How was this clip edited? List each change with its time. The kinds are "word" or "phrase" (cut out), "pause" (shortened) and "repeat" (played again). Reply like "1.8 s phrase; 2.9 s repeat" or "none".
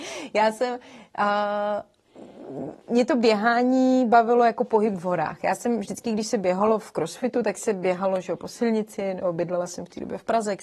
2.8 s pause